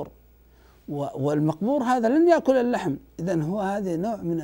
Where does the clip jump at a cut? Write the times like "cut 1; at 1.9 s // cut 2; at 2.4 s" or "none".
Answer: none